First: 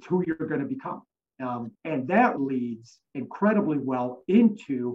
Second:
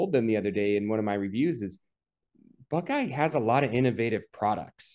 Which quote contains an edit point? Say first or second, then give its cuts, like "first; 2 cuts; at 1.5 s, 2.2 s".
first; 3 cuts; at 1.7 s, 2.4 s, 3.1 s